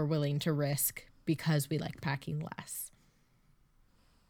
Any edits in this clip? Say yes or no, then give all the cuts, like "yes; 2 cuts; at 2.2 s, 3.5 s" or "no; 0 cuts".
no; 0 cuts